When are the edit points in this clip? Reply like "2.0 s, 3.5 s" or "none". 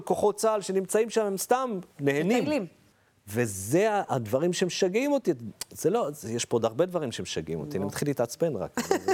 1.9 s, 2.9 s